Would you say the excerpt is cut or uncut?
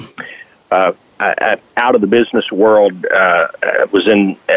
uncut